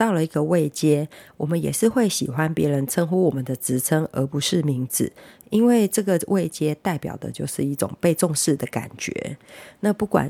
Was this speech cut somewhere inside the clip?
no; 0 cuts

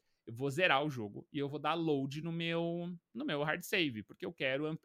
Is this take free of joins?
yes; 0 cuts

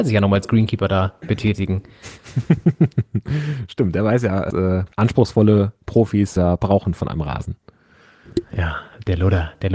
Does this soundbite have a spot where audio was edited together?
yes; 3 cuts; at 4.5 s, 4.9 s, 6.4 s

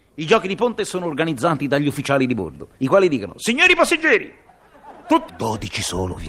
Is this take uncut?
no; 2 cuts; at 2.8 s, 5.3 s

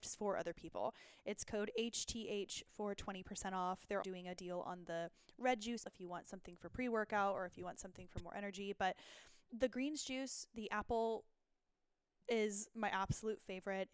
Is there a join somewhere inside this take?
yes; 3 cuts; at 4.0 s, 5.9 s, 9.4 s

